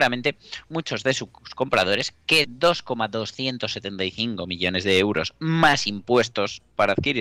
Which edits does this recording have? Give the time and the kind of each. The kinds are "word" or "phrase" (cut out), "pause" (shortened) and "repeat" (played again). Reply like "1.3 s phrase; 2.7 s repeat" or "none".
2.4 s word